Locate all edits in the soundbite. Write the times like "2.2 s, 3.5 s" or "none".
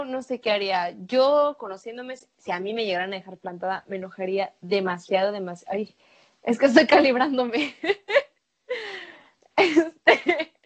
none